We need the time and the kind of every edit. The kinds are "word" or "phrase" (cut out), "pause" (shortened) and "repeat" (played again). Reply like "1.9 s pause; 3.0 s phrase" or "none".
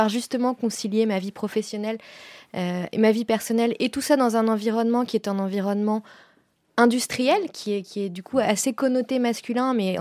none